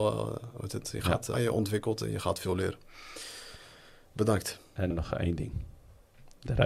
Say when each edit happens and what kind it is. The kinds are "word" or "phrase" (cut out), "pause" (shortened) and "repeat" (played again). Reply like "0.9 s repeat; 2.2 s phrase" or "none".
1.3 s word; 4.9 s word

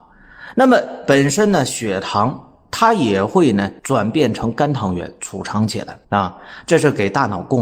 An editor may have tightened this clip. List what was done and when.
3.8 s pause; 6.0 s pause

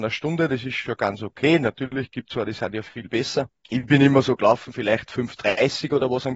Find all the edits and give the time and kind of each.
3.6 s pause

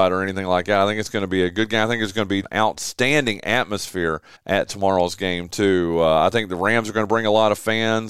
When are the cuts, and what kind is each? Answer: 2.4 s word; 4.4 s pause

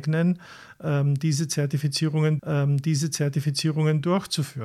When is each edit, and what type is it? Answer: 2.4 s repeat

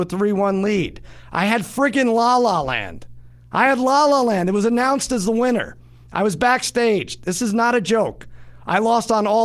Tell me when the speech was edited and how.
none

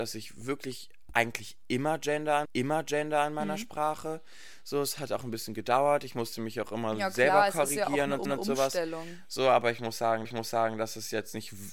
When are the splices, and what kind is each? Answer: 2.5 s repeat; 8.3 s repeat; 10.3 s repeat

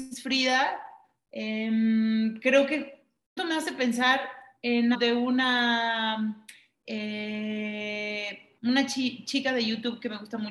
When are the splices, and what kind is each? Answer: 3.4 s word; 4.9 s word; 8.6 s pause

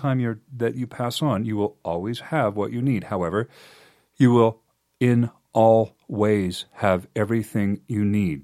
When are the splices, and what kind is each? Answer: none

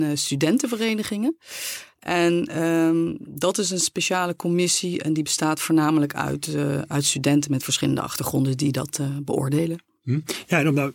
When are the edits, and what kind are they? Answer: none

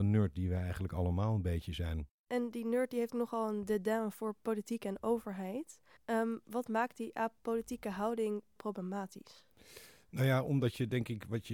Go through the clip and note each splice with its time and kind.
2.2 s pause; 3.1 s word; 6.0 s pause; 8.6 s word

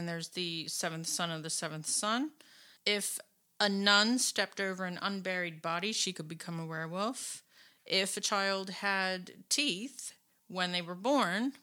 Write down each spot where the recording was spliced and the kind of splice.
none

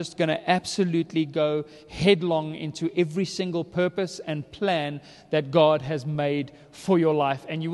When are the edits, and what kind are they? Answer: none

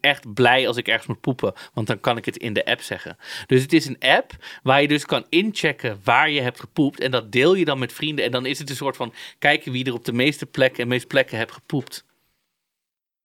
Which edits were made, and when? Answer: 11.0 s word

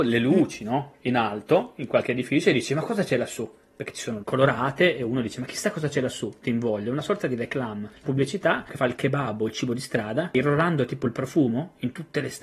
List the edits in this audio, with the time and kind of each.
4.2 s word; 8.0 s word

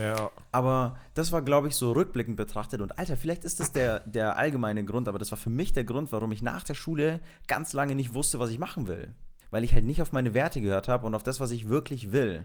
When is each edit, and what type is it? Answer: 9.4 s pause

